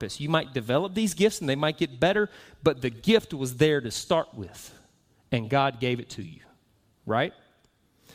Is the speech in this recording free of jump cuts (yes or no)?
yes